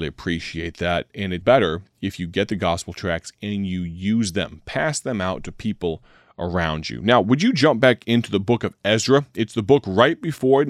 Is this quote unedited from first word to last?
no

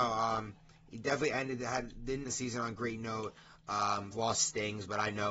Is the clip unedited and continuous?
no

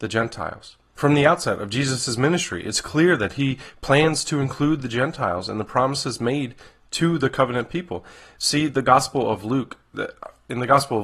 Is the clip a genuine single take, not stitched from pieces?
yes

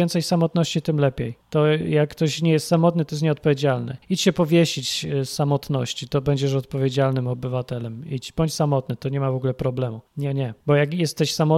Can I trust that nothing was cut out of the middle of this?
no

